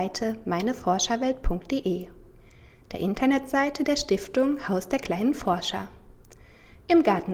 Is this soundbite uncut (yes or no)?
yes